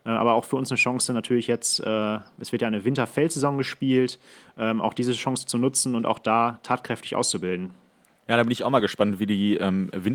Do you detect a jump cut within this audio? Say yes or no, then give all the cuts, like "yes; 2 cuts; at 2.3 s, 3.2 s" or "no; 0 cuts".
no; 0 cuts